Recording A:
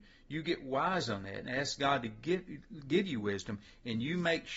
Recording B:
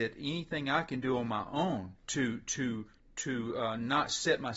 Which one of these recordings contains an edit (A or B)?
B